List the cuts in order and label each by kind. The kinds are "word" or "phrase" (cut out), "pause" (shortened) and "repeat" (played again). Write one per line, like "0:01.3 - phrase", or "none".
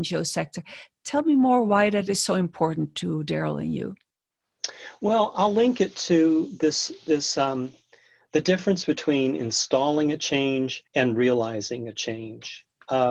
0:10.9 - pause